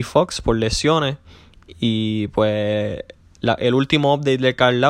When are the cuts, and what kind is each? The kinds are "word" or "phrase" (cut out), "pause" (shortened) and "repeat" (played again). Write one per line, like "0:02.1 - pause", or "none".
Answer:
none